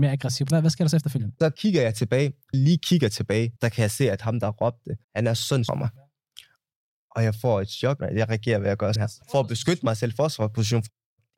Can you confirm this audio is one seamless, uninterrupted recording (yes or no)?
no